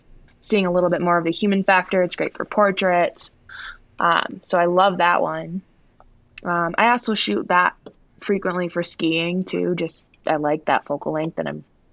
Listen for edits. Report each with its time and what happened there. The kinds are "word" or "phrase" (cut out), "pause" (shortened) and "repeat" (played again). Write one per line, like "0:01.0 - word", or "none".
none